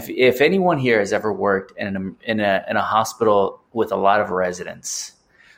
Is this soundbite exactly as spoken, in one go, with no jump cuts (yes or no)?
no